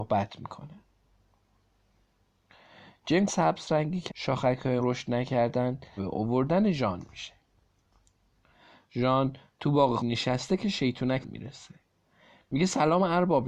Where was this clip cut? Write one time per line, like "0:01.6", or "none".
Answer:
0:03.3
0:04.1
0:04.8
0:06.0
0:10.0
0:11.2